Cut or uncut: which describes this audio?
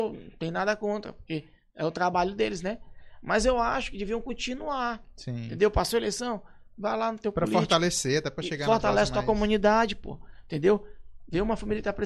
uncut